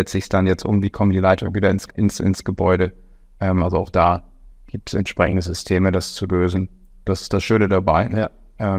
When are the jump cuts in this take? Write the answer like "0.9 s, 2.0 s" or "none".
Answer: 1.9 s